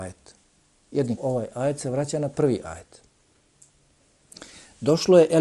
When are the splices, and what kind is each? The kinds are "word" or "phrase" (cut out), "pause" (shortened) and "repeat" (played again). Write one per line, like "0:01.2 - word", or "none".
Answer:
0:01.2 - word